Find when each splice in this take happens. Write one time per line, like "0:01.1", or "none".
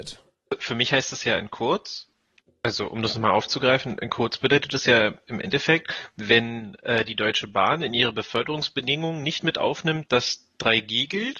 none

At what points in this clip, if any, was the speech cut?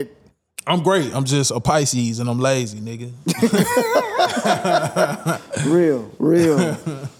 none

